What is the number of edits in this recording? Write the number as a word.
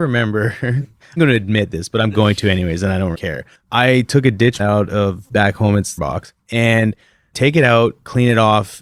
five